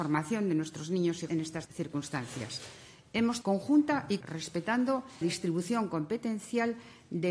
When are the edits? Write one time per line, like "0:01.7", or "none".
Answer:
0:01.3
0:01.6
0:03.4
0:04.2
0:05.2